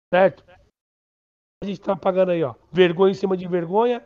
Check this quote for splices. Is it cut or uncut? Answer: cut